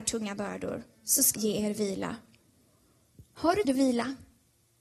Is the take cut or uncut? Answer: cut